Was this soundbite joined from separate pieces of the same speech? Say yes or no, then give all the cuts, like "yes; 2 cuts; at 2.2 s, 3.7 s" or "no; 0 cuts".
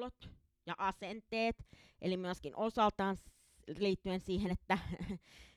no; 0 cuts